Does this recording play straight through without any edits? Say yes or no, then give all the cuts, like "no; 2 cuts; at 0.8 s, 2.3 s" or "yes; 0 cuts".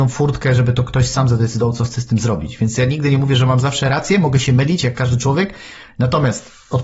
yes; 0 cuts